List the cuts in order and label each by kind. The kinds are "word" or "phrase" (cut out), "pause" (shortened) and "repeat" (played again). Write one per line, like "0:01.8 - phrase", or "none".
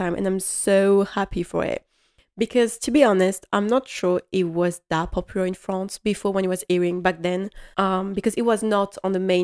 0:07.7 - pause